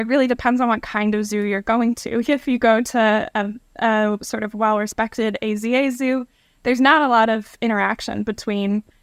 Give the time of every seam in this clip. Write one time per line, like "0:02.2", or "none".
none